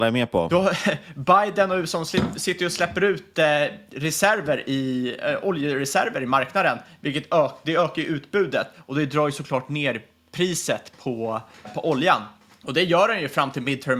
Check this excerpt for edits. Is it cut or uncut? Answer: uncut